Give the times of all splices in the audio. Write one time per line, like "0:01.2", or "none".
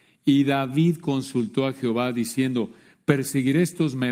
none